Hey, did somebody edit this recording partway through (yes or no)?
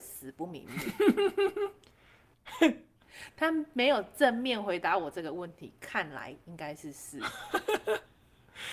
no